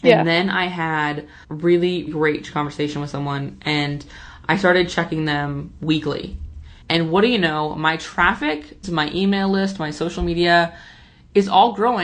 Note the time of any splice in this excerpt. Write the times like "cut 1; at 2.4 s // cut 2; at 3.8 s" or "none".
cut 1; at 1.4 s // cut 2; at 2.1 s // cut 3; at 6.8 s // cut 4; at 8.8 s